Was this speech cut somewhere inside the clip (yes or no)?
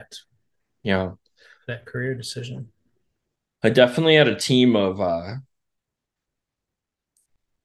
no